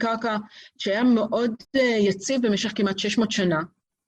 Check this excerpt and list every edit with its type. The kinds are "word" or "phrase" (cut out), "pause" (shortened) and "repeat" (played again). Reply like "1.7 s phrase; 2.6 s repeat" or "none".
1.6 s pause